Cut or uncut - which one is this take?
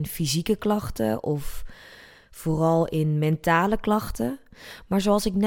uncut